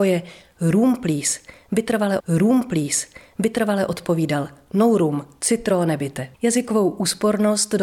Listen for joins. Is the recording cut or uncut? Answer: cut